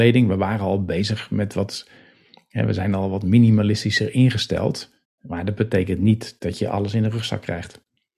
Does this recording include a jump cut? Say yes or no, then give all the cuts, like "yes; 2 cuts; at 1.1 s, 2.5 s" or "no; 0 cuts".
no; 0 cuts